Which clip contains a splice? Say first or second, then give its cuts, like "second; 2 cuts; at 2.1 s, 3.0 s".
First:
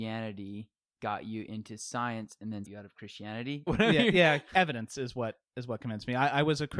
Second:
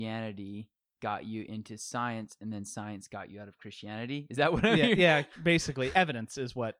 first; 3 cuts; at 2.6 s, 3.7 s, 4.5 s